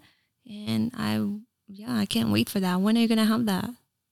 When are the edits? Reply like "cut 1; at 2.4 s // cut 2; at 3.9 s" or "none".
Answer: none